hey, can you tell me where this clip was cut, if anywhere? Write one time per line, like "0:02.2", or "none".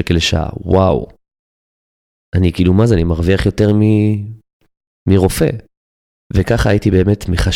none